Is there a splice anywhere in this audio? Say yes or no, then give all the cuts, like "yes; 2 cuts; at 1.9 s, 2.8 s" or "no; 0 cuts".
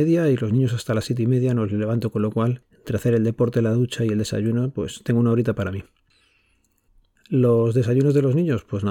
no; 0 cuts